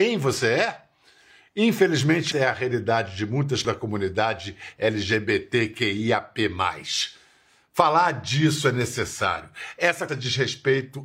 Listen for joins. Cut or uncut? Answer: cut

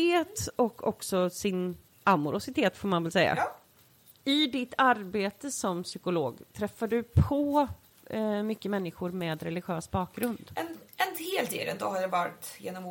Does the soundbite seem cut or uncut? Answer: uncut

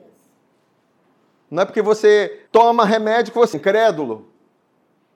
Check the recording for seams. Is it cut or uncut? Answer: cut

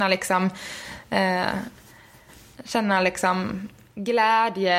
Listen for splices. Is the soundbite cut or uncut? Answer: uncut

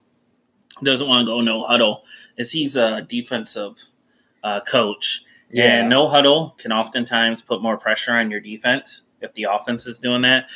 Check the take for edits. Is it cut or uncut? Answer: uncut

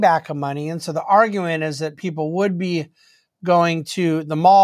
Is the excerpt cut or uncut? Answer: uncut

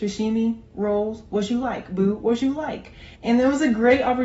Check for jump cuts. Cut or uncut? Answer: cut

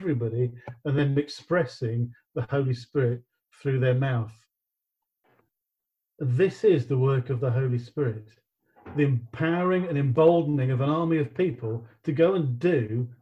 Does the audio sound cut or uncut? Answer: uncut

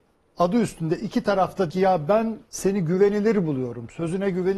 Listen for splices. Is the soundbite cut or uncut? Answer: cut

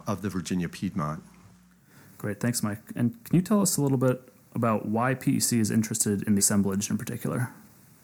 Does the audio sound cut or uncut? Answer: cut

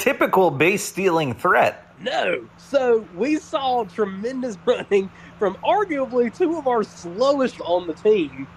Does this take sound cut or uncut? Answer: cut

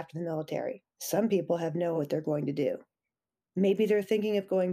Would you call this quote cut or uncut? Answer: cut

